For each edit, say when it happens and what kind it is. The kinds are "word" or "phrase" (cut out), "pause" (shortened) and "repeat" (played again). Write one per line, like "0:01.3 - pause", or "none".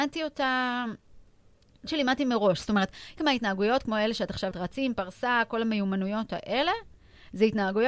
0:01.9 - word
0:03.2 - word
0:04.5 - word